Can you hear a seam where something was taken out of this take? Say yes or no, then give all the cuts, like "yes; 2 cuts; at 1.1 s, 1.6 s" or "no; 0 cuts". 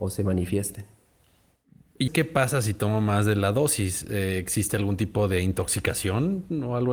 yes; 1 cut; at 2.1 s